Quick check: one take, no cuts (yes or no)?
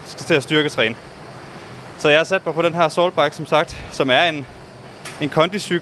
yes